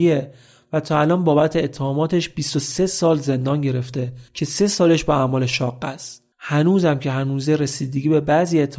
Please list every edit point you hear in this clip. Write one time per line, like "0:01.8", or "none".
0:04.3
0:06.3